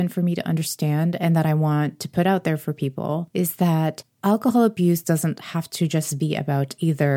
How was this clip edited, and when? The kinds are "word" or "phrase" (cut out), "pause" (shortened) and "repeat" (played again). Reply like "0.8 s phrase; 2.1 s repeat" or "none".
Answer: none